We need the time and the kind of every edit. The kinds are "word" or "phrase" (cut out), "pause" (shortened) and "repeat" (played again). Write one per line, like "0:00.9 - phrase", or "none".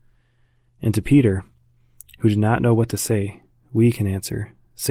none